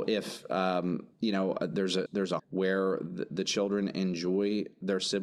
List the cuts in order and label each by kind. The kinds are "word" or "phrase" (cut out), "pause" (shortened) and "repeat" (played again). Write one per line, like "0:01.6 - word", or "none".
0:01.1 - pause
0:02.1 - word
0:02.4 - word